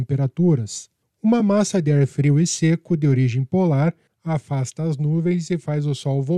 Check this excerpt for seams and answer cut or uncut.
uncut